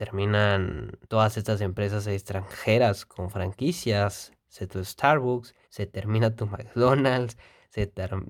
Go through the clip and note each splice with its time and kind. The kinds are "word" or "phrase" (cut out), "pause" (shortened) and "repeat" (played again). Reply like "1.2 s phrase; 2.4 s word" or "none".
1.0 s pause; 4.7 s word; 5.6 s pause